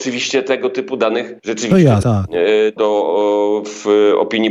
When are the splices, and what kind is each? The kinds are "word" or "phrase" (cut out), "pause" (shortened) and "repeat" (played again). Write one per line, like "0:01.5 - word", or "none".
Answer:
0:01.4 - pause
0:02.0 - word
0:02.8 - word